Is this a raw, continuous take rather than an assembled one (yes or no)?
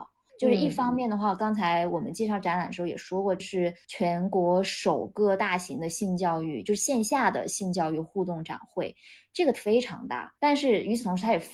no